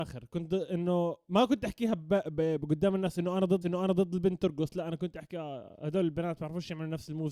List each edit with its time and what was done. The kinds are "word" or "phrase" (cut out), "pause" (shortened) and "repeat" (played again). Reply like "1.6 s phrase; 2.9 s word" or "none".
3.6 s repeat